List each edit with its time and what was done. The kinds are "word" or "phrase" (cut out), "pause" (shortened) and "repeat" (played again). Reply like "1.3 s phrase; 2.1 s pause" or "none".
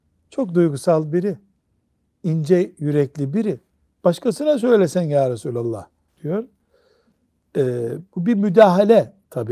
none